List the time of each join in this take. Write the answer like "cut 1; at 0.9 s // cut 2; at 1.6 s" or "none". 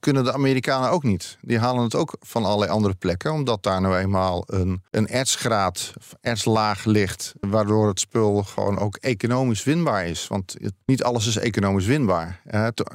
cut 1; at 4.9 s // cut 2; at 7.4 s // cut 3; at 10.8 s